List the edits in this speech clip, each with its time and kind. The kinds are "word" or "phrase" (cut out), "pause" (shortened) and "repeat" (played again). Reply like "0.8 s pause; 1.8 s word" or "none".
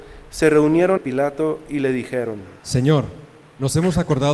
1.0 s word; 2.6 s pause